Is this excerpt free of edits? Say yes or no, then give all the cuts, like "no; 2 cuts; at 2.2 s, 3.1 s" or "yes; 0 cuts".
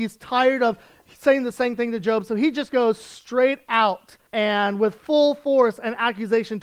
no; 1 cut; at 4.3 s